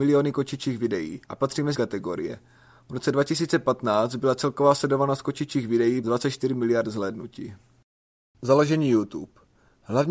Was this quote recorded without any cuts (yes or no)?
no